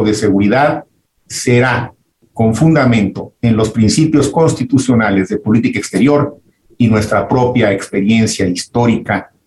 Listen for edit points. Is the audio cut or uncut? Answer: uncut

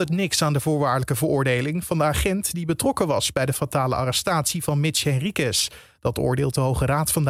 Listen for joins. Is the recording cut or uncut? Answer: uncut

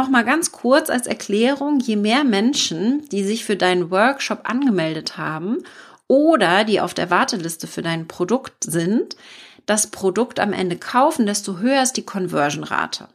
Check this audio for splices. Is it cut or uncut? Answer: uncut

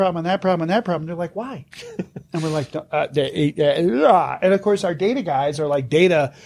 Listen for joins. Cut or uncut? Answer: cut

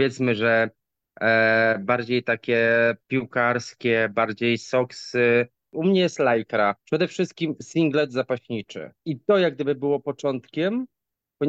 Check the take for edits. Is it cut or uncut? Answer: cut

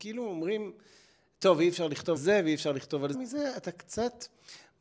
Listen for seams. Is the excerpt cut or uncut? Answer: cut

